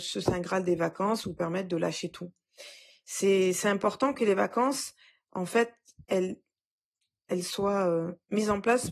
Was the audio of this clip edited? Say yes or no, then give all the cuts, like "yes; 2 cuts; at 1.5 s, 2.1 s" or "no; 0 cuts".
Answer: yes; 1 cut; at 6.0 s